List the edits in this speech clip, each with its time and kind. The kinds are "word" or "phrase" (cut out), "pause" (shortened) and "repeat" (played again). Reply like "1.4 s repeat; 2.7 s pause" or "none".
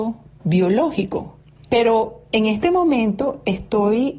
none